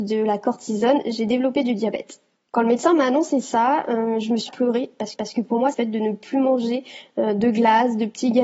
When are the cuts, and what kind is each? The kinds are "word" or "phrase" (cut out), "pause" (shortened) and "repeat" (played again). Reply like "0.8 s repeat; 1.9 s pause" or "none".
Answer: 2.4 s pause; 4.5 s phrase; 5.1 s repeat; 5.7 s phrase